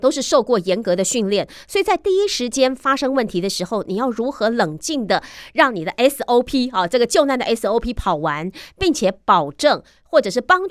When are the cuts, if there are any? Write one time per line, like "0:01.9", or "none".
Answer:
none